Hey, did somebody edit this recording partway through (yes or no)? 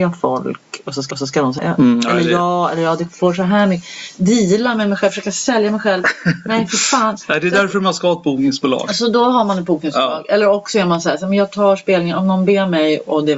yes